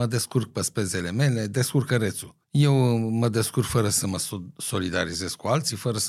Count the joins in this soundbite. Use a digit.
1